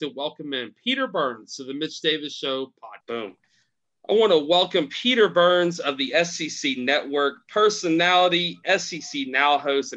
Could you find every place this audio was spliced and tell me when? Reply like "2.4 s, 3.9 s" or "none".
3.0 s